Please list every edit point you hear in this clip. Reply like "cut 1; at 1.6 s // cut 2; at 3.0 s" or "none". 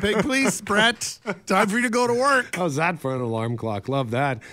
none